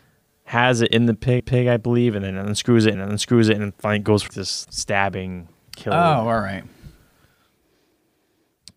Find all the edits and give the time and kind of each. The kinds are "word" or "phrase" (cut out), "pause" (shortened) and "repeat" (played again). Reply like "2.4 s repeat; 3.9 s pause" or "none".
1.4 s repeat; 2.9 s repeat; 4.3 s word; 4.6 s word

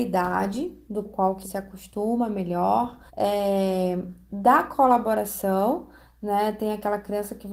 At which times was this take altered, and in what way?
1.0 s word; 1.4 s word; 3.1 s pause

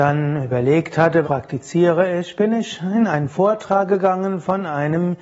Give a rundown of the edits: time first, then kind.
1.2 s word

